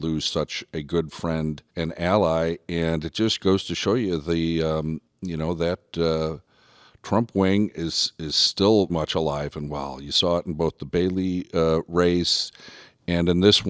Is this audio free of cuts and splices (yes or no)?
no